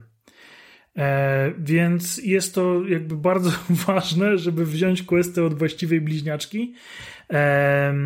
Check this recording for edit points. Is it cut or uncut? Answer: uncut